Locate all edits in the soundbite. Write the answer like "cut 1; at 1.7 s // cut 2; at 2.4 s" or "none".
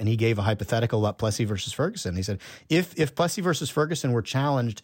none